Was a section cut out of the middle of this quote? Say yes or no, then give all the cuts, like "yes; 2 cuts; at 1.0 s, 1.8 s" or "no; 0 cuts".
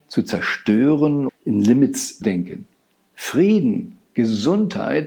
yes; 2 cuts; at 1.3 s, 2.2 s